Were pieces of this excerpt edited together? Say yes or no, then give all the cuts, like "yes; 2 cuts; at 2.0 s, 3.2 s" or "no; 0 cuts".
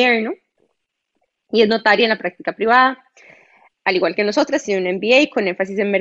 no; 0 cuts